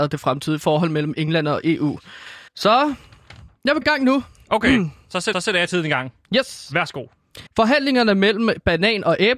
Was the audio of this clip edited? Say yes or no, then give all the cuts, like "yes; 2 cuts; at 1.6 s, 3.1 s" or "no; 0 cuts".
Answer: yes; 4 cuts; at 2.5 s, 3.8 s, 5.3 s, 7.5 s